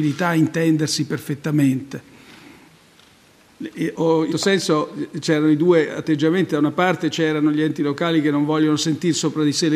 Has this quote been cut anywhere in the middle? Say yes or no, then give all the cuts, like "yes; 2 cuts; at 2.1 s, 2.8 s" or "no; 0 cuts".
yes; 2 cuts; at 3.9 s, 4.3 s